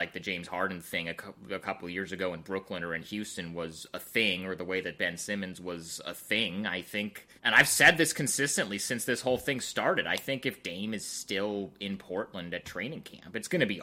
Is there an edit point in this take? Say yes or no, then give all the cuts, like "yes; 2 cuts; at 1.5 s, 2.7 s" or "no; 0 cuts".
yes; 1 cut; at 7.4 s